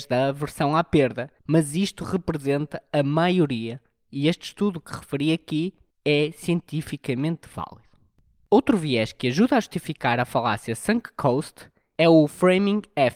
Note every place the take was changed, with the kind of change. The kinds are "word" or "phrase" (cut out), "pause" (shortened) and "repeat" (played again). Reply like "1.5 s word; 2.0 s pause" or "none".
none